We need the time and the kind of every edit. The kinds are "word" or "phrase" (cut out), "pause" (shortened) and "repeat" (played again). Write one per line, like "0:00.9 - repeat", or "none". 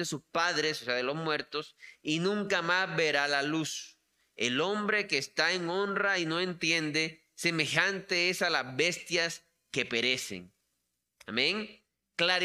none